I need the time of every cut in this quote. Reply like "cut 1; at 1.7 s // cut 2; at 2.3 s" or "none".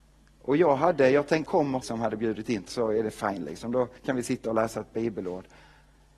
cut 1; at 1.5 s // cut 2; at 1.8 s // cut 3; at 2.7 s // cut 4; at 4.0 s